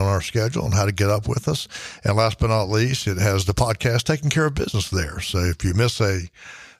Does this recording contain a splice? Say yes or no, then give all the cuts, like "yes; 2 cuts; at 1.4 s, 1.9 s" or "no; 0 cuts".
no; 0 cuts